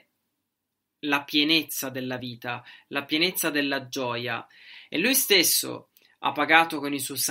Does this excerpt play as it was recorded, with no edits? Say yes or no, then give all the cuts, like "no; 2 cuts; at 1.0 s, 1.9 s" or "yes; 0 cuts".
yes; 0 cuts